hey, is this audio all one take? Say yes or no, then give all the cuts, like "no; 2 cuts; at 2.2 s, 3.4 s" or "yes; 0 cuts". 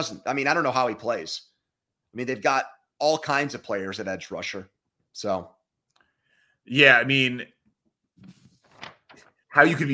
yes; 0 cuts